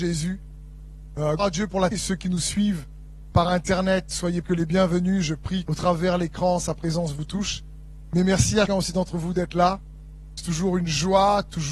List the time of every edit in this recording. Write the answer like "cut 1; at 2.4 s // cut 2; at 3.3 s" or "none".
cut 1; at 1.4 s // cut 2; at 1.9 s // cut 3; at 3.3 s // cut 4; at 4.4 s // cut 5; at 5.7 s // cut 6; at 8.7 s